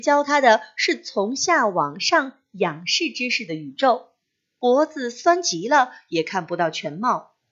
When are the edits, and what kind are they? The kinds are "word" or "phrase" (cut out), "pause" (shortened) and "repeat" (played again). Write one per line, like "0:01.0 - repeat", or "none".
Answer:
none